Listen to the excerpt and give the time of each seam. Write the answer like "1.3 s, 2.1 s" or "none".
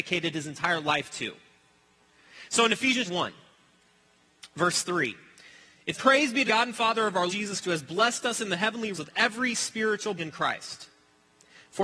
3.1 s, 5.9 s, 6.5 s, 7.3 s, 7.6 s, 8.9 s, 10.2 s